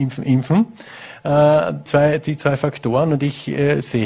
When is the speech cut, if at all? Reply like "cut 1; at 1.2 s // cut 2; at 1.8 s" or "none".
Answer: cut 1; at 1.9 s